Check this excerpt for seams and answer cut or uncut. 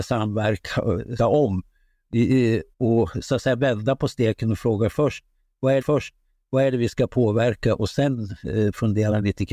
cut